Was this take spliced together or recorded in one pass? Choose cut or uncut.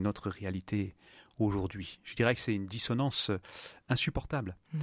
uncut